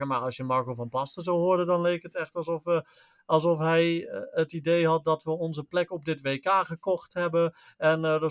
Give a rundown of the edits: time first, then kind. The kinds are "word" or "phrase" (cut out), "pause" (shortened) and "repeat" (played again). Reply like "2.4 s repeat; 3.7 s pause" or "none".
none